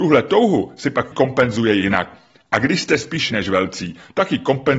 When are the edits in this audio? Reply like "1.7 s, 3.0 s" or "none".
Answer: 1.1 s, 3.3 s